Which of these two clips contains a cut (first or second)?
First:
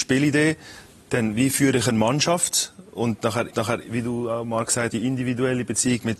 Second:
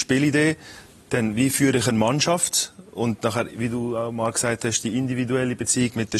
first